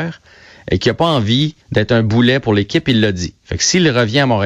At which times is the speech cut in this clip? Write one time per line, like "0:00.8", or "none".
0:01.6